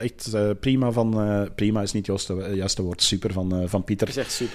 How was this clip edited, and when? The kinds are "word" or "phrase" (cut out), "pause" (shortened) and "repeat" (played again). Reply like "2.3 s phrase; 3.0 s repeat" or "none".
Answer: none